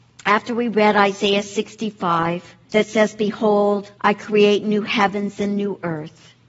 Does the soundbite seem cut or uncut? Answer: cut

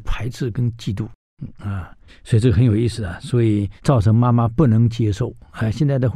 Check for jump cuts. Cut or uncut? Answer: cut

